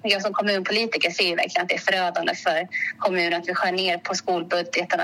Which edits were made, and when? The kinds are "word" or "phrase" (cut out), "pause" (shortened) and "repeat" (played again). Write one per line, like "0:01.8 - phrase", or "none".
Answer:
none